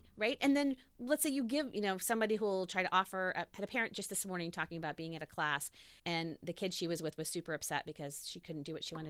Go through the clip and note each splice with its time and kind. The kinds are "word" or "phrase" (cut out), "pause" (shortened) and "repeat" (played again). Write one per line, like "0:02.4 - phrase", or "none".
0:06.0 - pause